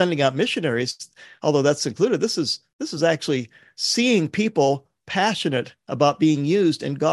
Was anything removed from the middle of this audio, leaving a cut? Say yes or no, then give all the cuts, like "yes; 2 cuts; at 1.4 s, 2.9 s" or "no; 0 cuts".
no; 0 cuts